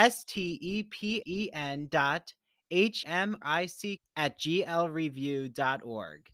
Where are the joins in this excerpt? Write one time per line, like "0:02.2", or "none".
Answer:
0:01.2
0:03.0
0:03.4
0:04.0